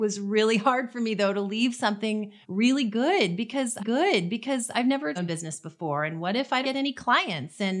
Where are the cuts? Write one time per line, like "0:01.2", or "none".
0:02.4
0:03.8
0:05.2
0:06.6